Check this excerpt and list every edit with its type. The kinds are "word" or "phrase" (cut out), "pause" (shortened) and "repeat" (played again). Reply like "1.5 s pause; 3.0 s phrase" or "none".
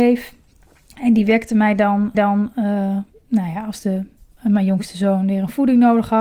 2.1 s repeat

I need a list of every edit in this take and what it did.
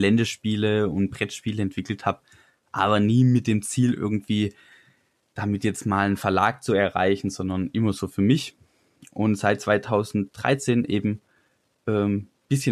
none

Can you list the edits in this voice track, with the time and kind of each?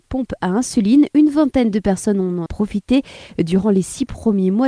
2.5 s phrase

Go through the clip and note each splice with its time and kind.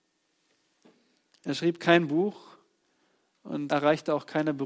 3.7 s word

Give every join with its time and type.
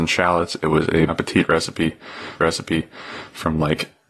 1.1 s word; 2.4 s repeat

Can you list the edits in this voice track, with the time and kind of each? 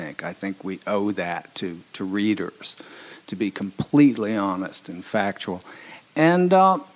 none

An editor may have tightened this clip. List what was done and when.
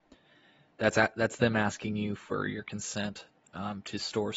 none

